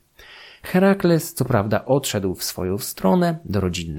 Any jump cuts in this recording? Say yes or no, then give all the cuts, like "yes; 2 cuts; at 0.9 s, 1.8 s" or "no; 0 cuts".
no; 0 cuts